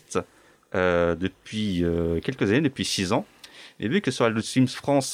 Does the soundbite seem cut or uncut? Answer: uncut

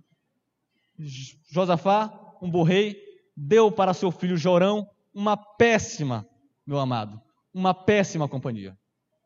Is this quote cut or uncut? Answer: uncut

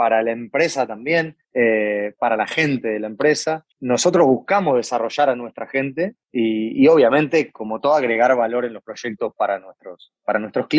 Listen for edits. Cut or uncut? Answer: cut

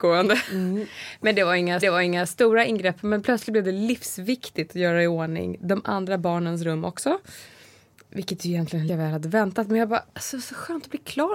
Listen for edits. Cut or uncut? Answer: cut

